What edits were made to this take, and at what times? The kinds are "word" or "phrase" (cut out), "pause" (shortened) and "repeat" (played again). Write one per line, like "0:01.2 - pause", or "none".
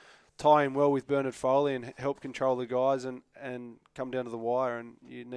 none